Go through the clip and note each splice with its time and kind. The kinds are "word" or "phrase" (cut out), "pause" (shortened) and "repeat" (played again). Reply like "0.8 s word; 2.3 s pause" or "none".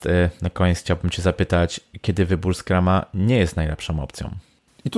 none